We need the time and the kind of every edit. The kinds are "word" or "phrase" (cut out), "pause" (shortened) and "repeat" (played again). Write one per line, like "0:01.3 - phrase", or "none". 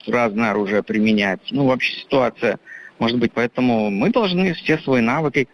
0:01.5 - word
0:03.3 - word